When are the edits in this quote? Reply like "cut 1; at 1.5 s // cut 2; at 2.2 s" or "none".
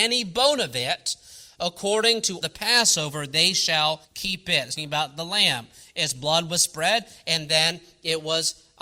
cut 1; at 2.4 s // cut 2; at 4.0 s // cut 3; at 4.8 s